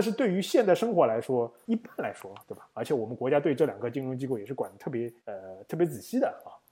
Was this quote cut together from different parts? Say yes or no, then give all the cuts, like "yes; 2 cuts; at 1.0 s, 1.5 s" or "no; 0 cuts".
yes; 1 cut; at 5.2 s